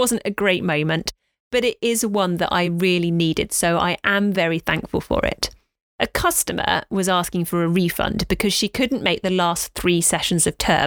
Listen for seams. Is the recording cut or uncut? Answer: uncut